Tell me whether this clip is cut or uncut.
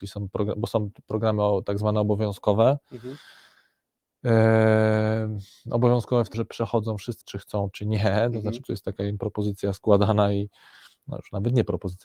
cut